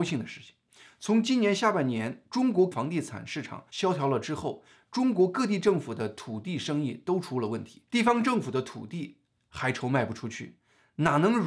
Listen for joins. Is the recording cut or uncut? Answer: cut